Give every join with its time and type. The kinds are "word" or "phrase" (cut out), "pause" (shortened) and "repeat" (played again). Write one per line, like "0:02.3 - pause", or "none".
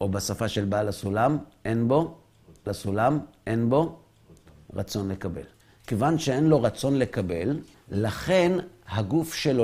0:02.7 - repeat
0:05.6 - pause
0:07.7 - pause